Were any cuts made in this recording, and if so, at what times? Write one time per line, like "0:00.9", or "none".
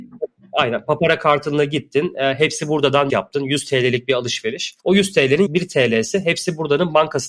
0:03.1
0:04.8
0:05.5